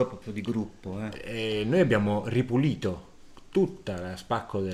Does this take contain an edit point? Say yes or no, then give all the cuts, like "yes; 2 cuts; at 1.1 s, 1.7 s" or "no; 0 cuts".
no; 0 cuts